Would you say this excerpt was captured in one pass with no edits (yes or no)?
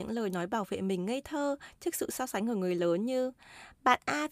yes